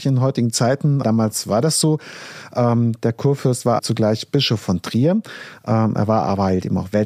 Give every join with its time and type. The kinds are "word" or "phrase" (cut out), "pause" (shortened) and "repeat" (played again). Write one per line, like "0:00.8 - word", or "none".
0:01.0 - word
0:03.8 - word